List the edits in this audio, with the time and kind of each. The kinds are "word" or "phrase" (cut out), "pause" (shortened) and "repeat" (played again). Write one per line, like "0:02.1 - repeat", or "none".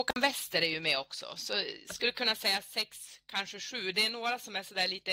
none

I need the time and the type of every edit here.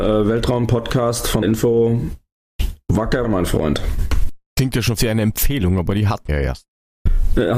0:01.4 - word
0:03.2 - word
0:04.5 - pause
0:05.0 - word
0:06.3 - word

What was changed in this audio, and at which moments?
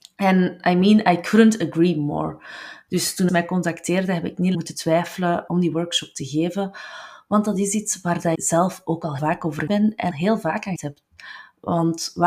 0:03.3 - word
0:04.5 - word
0:05.5 - word
0:08.3 - word
0:09.2 - word
0:09.7 - word
0:10.1 - word
0:10.8 - word

